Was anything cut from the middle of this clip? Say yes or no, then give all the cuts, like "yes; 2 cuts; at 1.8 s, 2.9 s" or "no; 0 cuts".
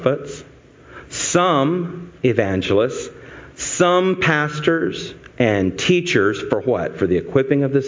no; 0 cuts